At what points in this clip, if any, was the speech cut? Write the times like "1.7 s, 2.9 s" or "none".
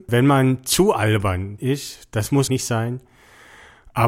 1.6 s, 2.5 s